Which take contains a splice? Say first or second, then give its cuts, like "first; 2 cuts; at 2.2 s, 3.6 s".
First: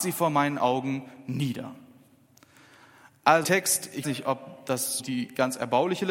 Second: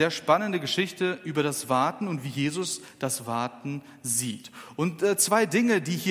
first; 3 cuts; at 3.4 s, 4.0 s, 5.0 s